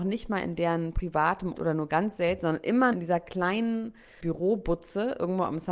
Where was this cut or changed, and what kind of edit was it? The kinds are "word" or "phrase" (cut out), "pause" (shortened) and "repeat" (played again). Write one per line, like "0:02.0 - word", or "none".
0:01.5 - word
0:02.9 - word
0:04.2 - word